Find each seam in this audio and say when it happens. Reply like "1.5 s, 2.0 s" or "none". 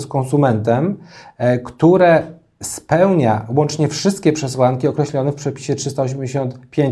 none